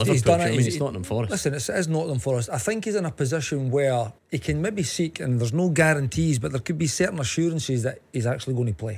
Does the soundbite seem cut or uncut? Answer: cut